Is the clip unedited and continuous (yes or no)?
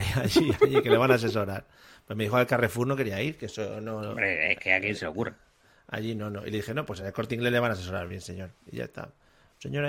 yes